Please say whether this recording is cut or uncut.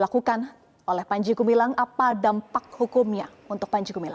uncut